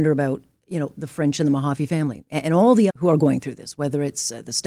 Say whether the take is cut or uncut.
cut